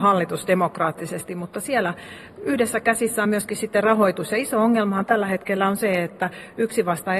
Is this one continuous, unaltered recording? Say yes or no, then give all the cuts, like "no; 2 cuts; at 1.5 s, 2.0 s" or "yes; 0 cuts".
yes; 0 cuts